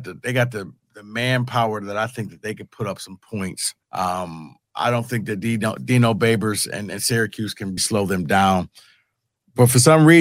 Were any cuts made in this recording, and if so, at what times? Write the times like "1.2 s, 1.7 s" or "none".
3.8 s, 7.8 s